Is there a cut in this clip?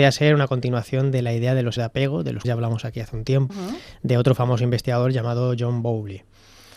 yes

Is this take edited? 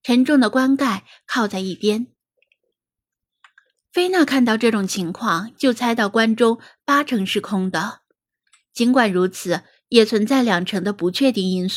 no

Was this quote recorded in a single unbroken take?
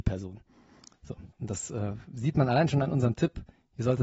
no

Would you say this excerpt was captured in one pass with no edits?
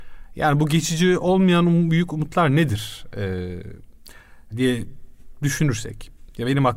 no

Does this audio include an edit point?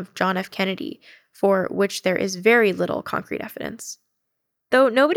no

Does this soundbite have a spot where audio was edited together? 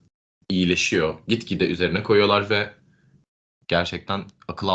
no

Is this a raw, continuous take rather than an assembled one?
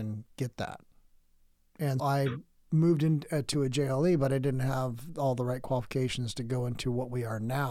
no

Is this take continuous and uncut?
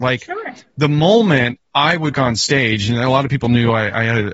no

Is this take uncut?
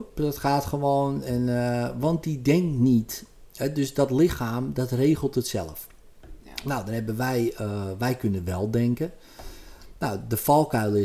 yes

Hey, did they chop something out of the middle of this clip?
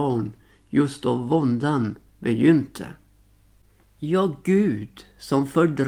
no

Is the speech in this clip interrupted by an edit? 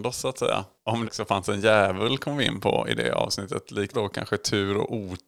yes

